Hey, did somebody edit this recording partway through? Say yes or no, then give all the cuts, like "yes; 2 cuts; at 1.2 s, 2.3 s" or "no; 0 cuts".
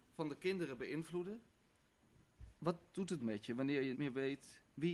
yes; 2 cuts; at 3.2 s, 3.9 s